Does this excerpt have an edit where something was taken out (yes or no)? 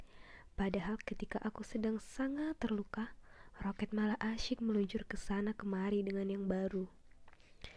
no